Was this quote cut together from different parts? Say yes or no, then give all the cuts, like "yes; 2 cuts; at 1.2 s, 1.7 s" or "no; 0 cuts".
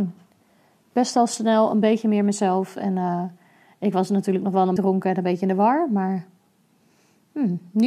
yes; 1 cut; at 4.8 s